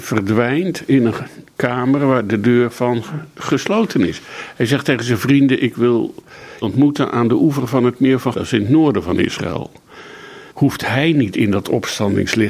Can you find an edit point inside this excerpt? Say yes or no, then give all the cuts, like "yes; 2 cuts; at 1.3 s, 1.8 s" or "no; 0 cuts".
yes; 3 cuts; at 6.6 s, 8.3 s, 10.5 s